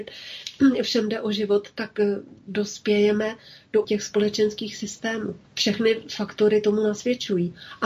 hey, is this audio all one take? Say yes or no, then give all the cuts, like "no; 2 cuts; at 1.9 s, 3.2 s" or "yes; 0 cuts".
no; 3 cuts; at 2.4 s, 3.8 s, 5.5 s